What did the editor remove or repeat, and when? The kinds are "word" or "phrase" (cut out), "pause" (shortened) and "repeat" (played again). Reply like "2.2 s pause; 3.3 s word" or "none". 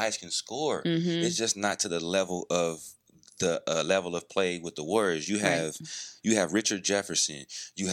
none